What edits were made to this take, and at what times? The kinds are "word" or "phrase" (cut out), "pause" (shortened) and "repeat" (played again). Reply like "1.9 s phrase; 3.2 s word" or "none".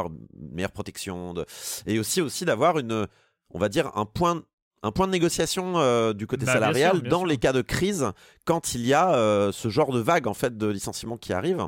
none